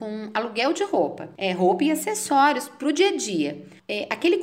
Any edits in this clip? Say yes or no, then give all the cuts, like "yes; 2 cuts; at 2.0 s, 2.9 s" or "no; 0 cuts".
no; 0 cuts